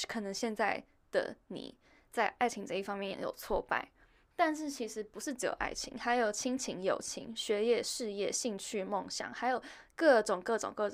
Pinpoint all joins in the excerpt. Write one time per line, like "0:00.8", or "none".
none